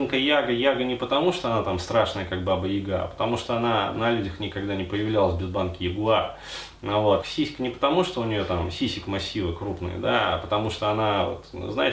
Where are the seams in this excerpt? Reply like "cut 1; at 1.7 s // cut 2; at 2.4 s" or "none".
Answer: cut 1; at 7.2 s